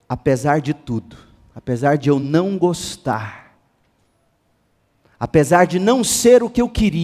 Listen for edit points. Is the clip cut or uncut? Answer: uncut